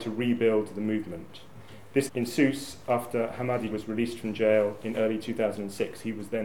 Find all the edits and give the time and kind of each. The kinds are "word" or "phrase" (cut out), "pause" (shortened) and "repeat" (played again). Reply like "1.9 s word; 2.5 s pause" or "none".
2.1 s word; 3.7 s word